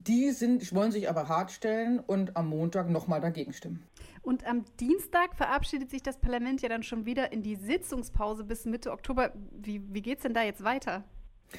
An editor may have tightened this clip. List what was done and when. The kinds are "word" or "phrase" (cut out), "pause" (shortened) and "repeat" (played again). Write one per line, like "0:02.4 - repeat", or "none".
none